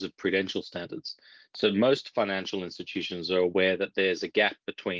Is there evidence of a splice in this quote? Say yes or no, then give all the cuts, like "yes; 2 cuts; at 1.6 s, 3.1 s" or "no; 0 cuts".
no; 0 cuts